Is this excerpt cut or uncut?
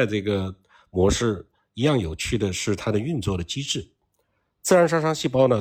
uncut